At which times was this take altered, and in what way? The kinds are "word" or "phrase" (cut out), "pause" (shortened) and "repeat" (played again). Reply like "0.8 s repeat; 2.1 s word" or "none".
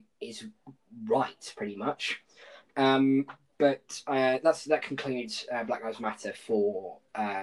none